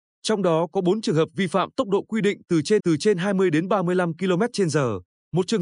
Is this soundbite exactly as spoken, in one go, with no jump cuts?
no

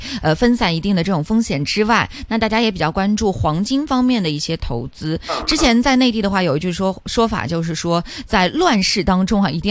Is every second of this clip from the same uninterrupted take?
yes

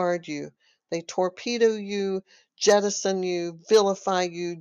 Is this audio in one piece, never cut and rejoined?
yes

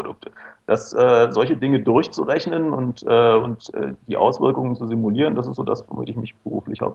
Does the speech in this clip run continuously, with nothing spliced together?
yes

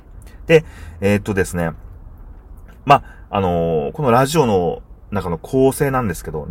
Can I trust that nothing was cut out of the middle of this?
yes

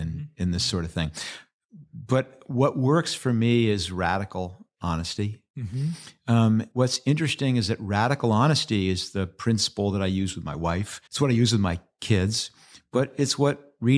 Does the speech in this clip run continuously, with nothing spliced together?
no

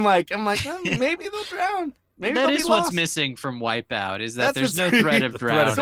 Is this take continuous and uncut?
yes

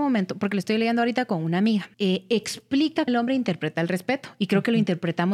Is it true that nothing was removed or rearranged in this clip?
no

